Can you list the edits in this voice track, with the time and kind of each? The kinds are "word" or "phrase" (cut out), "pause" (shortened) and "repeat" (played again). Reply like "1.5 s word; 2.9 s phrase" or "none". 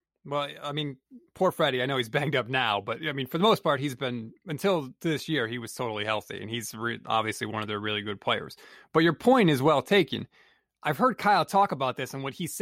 none

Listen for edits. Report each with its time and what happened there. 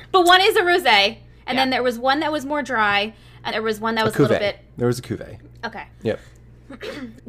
3.5 s word; 5.9 s pause

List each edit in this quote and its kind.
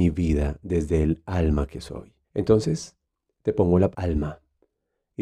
2.2 s pause; 3.9 s word

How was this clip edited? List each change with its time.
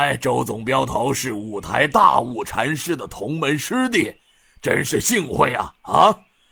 none

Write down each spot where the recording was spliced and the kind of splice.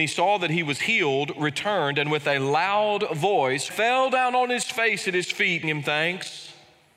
3.7 s phrase; 5.6 s word

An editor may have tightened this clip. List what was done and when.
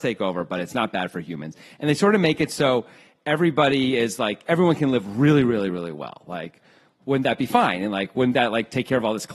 none

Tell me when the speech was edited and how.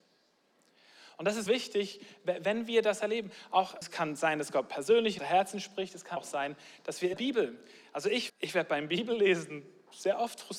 1.5 s word; 3.8 s word; 5.2 s word; 6.2 s word; 7.1 s word; 8.3 s word

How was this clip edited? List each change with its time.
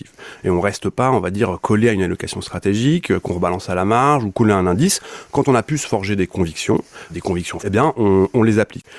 7.1 s word; 7.6 s word

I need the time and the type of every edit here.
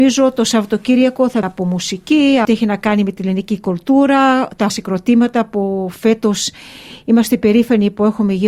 1.4 s word; 2.4 s phrase; 4.7 s word

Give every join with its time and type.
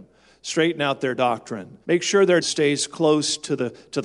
1.8 s pause; 2.4 s word

